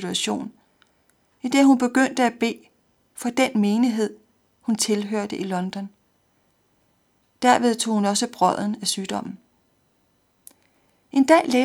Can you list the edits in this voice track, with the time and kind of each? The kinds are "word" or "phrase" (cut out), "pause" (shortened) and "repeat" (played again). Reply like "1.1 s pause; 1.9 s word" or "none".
none